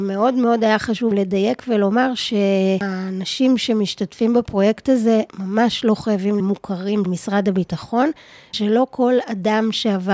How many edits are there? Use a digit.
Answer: 5